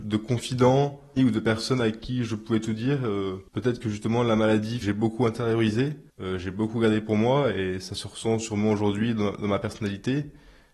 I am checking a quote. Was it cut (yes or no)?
yes